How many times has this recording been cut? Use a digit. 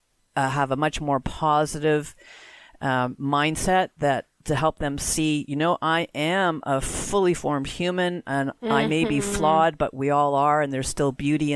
0